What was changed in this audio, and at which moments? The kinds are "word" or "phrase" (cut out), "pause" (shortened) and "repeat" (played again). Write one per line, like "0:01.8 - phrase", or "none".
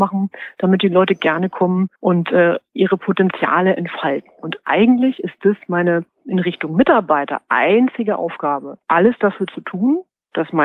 0:02.0 - pause